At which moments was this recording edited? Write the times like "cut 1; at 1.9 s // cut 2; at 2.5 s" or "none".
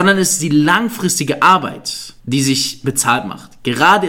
cut 1; at 2.2 s